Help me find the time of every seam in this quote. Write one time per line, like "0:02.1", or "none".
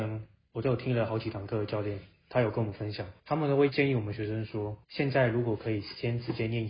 0:03.2
0:04.8